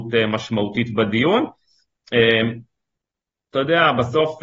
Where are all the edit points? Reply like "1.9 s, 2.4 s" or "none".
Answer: none